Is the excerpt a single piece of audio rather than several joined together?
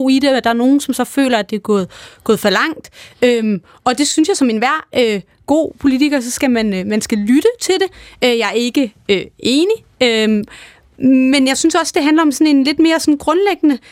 yes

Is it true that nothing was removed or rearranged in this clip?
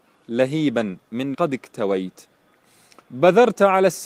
no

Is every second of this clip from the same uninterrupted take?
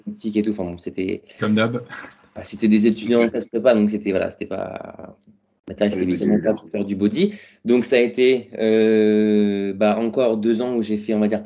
yes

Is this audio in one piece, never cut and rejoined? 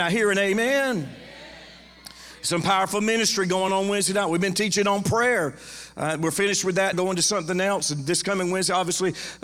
no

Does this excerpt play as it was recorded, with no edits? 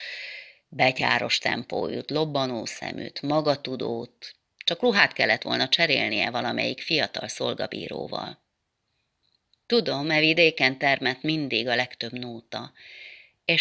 yes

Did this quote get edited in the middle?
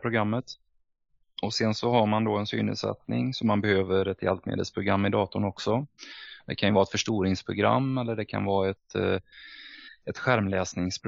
no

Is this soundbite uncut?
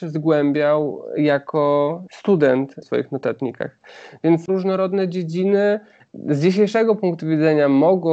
no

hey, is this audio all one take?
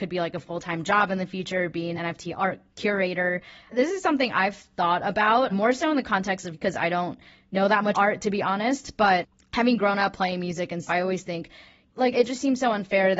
no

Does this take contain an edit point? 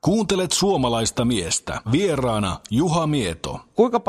yes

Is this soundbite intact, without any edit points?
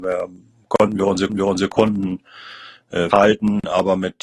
no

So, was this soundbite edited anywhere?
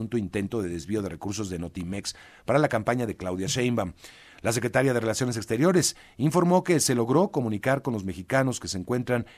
no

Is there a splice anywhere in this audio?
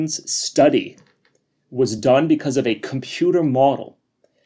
no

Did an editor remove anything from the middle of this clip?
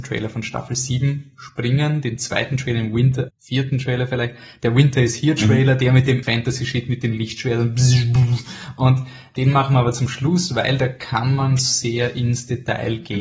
yes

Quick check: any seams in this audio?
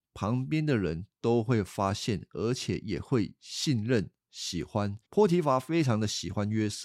yes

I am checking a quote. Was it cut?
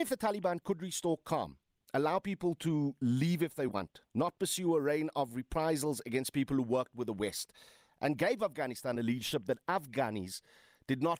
no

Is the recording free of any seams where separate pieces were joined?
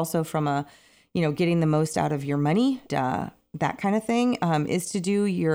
no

